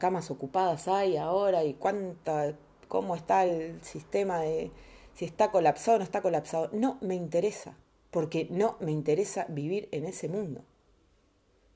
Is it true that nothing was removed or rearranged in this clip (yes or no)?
yes